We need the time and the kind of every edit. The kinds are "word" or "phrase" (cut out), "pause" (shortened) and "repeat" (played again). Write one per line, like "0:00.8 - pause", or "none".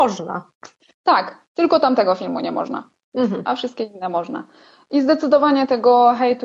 none

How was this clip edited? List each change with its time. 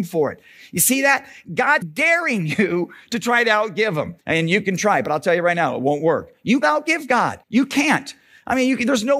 0:01.8 - word
0:04.2 - pause
0:06.6 - word
0:07.4 - pause

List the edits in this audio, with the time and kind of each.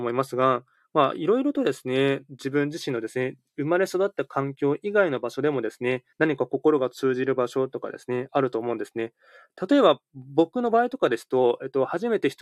0:06.1 - pause

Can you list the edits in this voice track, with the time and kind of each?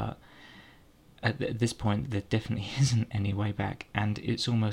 0:02.0 - word

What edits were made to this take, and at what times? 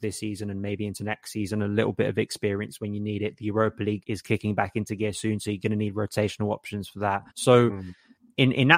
0:04.0 - word
0:07.3 - pause

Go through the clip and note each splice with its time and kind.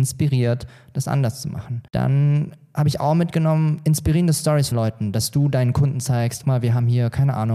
0:01.9 - pause
0:04.7 - word
0:06.4 - phrase

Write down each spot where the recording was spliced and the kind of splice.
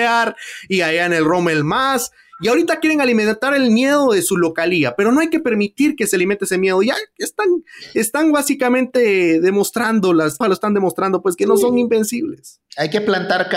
0:10.4 - phrase

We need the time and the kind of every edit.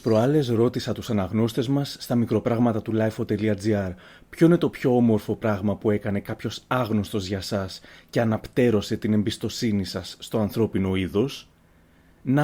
none

